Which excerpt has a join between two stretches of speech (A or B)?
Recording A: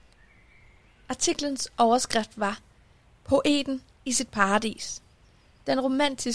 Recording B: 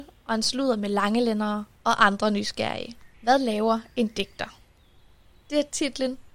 B